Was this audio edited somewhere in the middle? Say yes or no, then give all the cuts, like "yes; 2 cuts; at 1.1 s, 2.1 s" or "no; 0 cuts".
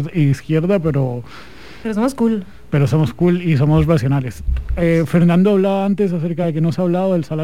no; 0 cuts